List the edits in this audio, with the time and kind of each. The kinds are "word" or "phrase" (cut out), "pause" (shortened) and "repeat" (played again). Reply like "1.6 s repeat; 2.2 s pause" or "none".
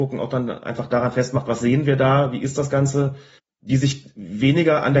3.4 s pause